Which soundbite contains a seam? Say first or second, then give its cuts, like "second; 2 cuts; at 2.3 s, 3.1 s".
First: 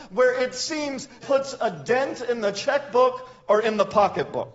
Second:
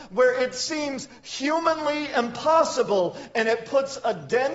first; 1 cut; at 1.2 s